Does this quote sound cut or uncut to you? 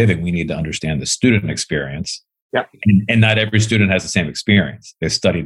uncut